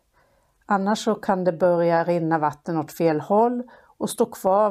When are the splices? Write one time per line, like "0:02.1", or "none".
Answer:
none